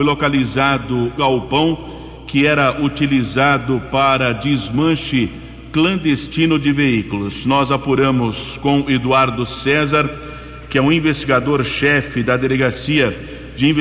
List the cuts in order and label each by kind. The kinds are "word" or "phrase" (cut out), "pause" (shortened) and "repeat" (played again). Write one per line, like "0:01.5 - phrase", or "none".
0:01.2 - word